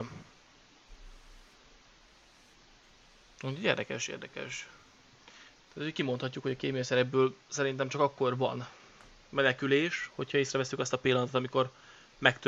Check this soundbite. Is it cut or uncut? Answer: uncut